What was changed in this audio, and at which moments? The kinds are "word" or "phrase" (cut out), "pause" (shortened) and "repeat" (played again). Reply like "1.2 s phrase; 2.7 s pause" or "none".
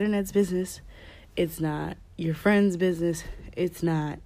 2.1 s pause